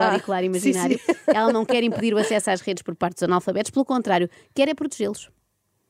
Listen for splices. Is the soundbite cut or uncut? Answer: uncut